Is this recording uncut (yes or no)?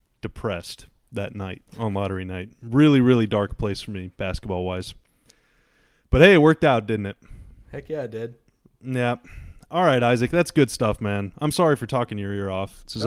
no